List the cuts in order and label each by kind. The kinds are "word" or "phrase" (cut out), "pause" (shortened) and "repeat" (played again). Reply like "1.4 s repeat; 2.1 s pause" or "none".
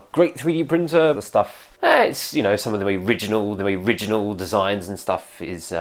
1.1 s phrase; 1.7 s pause; 3.6 s repeat